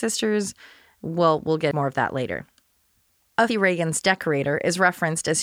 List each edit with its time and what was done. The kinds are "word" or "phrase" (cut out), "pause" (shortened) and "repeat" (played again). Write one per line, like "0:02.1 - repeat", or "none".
0:01.7 - word
0:03.5 - phrase